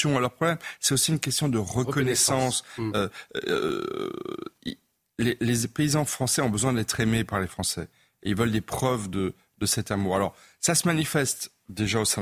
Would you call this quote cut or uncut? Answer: uncut